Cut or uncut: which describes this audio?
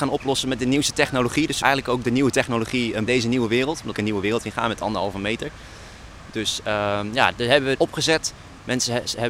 cut